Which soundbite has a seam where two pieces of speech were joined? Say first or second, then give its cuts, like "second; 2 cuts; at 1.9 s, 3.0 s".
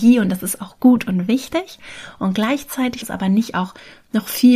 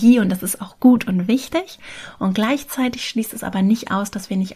first; 2 cuts; at 3.0 s, 3.5 s